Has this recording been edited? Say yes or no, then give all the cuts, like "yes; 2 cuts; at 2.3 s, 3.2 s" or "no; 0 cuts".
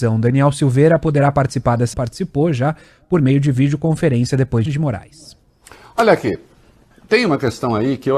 yes; 2 cuts; at 1.9 s, 4.7 s